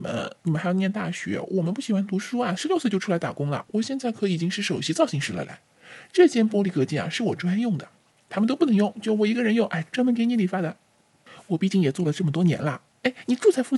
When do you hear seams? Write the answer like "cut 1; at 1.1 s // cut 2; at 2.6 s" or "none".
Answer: none